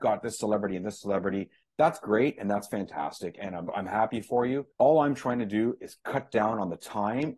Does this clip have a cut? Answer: yes; 1 cut; at 4.7 s

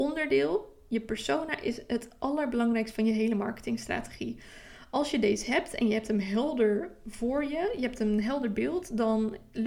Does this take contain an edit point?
no; 0 cuts

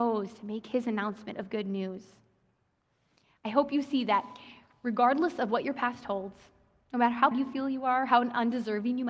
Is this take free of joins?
no; 1 cut; at 7.3 s

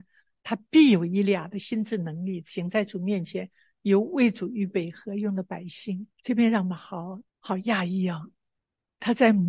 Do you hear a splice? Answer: yes; 2 cuts; at 6.1 s, 7.3 s

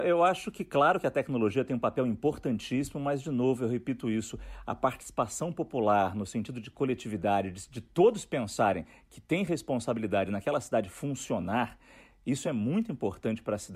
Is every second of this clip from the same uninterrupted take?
yes; 0 cuts

